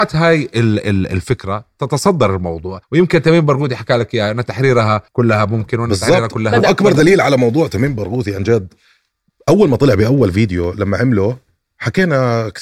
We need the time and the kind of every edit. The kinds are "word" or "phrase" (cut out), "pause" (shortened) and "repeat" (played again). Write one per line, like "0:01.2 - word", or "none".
0:02.8 - pause
0:05.1 - pause